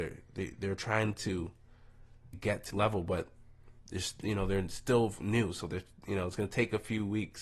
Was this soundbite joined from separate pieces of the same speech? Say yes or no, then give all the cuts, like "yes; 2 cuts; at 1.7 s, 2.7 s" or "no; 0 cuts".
yes; 3 cuts; at 2.3 s, 2.7 s, 3.8 s